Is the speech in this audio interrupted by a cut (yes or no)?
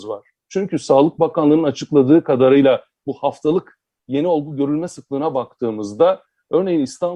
no